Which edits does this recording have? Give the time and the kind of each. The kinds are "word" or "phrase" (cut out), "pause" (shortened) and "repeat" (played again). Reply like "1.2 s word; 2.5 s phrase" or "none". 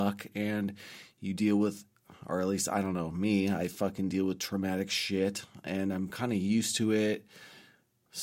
none